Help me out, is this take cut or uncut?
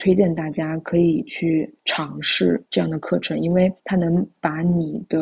cut